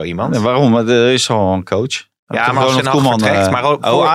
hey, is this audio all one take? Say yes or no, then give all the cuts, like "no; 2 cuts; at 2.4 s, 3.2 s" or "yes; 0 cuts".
yes; 0 cuts